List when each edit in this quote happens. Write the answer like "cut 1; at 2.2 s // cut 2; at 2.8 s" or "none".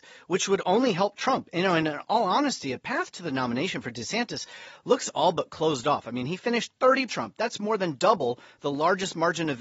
cut 1; at 7.1 s